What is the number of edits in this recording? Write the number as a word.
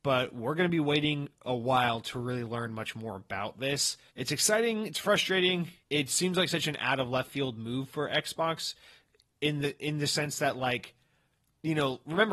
two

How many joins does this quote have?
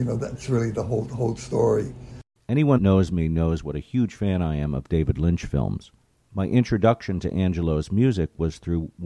one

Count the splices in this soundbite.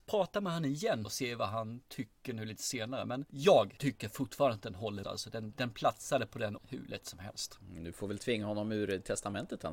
four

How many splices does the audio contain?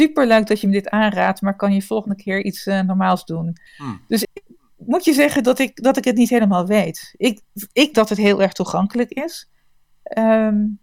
three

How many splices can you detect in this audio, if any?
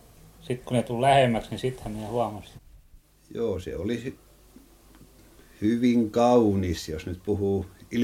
one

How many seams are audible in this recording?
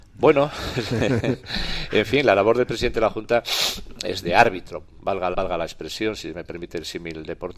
two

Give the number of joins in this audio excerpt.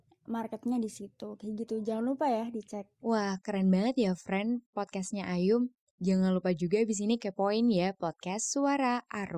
one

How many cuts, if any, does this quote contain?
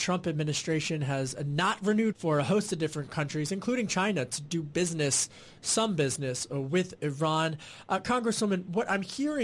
one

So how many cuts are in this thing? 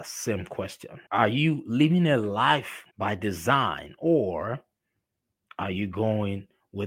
two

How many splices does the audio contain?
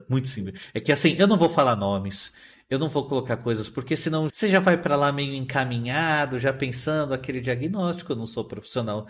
one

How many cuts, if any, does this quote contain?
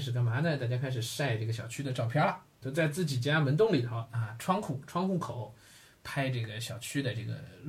one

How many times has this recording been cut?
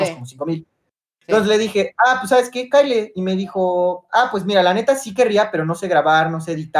zero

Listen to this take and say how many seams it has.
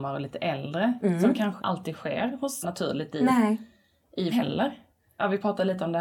three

